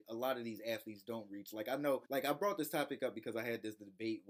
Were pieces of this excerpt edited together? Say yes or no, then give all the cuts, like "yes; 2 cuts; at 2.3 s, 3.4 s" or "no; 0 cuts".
yes; 1 cut; at 2.1 s